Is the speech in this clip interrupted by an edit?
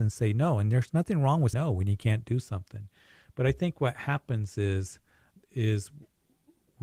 yes; 2 cuts; at 1.5 s, 5.4 s

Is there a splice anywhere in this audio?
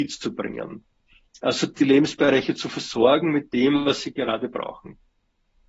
no; 0 cuts

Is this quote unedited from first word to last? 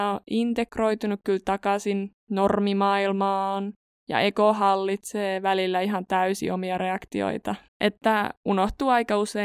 no; 2 cuts; at 2.2 s, 7.7 s

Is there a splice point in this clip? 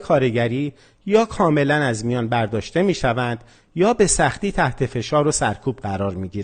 no; 0 cuts

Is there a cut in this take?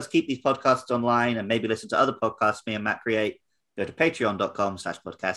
no; 0 cuts

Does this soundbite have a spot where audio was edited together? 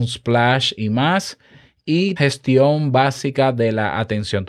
yes; 1 cut; at 2.2 s

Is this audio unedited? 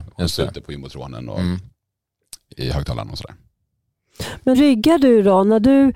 no; 1 cut; at 4.5 s

